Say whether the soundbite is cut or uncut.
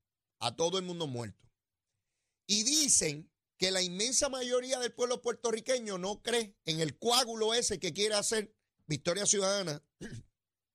uncut